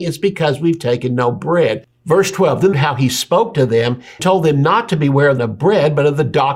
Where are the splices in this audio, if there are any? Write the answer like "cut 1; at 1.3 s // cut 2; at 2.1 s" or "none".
cut 1; at 2.7 s // cut 2; at 4.2 s // cut 3; at 5.4 s